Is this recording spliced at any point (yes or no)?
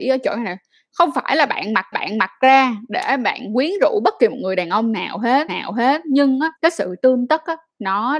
yes